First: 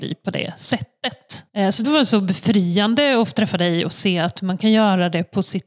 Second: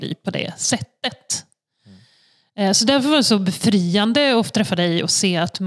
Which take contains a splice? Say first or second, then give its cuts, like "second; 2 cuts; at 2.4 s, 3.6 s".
first; 2 cuts; at 1.5 s, 1.8 s